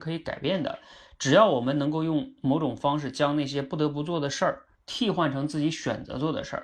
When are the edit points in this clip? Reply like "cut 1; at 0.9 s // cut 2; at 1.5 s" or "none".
cut 1; at 4.7 s